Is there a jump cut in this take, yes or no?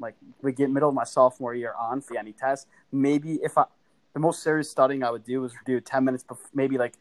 yes